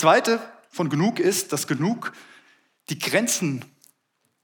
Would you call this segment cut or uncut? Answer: uncut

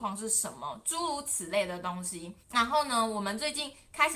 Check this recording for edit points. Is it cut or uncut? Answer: cut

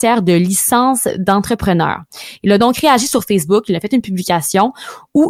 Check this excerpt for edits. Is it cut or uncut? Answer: uncut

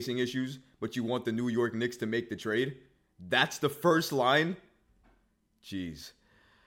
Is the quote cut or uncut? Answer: uncut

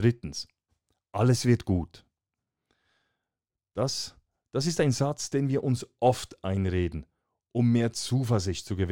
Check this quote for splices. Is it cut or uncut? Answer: uncut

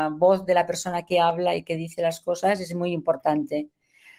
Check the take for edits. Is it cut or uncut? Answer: uncut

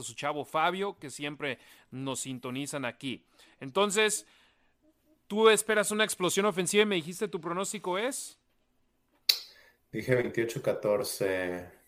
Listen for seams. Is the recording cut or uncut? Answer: uncut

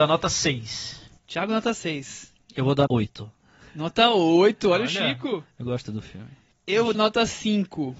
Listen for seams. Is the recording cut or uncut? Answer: cut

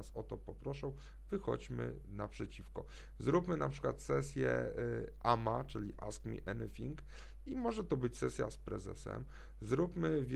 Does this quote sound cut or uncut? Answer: uncut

